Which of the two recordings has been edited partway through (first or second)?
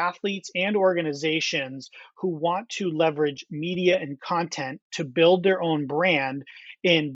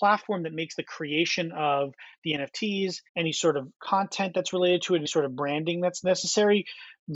second